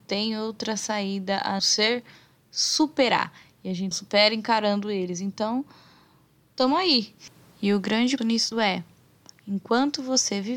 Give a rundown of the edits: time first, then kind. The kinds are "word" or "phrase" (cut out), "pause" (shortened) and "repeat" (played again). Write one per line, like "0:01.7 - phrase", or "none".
0:01.6 - word
0:03.9 - word
0:08.2 - word
0:08.5 - word